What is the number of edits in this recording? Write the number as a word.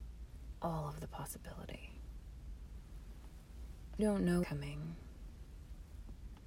two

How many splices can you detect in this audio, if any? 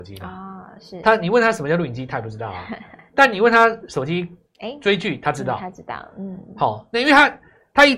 zero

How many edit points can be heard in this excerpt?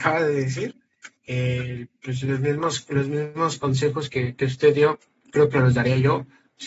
one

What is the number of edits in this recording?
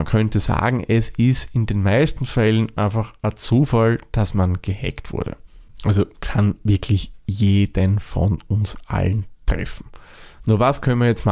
zero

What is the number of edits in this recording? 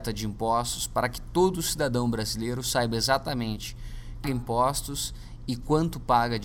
one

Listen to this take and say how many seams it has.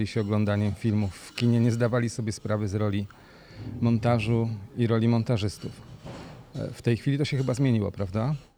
zero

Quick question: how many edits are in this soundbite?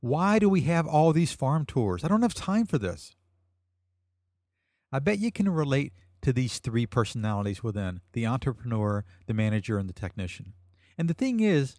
zero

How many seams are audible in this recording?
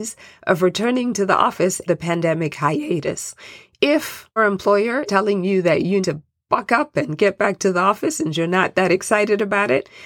four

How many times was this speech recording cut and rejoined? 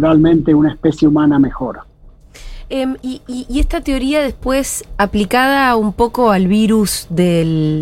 zero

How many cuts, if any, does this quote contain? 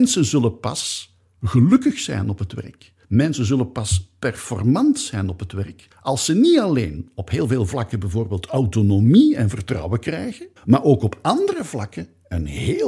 three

